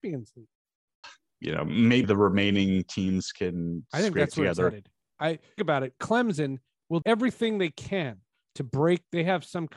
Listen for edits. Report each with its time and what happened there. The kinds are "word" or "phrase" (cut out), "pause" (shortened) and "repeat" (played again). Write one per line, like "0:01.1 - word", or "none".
0:01.0 - word
0:02.0 - word
0:05.6 - word
0:07.0 - word